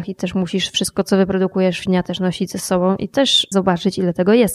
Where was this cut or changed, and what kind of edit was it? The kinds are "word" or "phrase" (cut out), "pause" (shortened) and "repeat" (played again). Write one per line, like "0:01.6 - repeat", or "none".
0:01.9 - word
0:03.5 - word